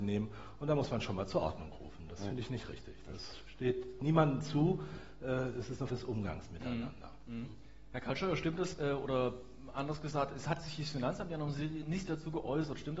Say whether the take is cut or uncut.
cut